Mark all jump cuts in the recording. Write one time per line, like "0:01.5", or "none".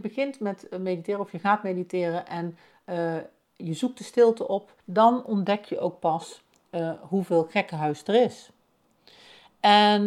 0:04.8